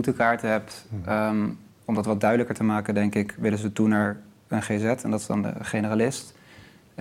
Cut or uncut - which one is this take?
uncut